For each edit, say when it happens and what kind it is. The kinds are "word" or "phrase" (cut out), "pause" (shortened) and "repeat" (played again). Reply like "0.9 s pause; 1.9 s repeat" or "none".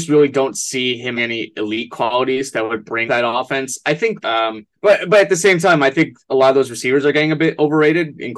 1.2 s word; 3.1 s word; 4.2 s phrase; 4.8 s pause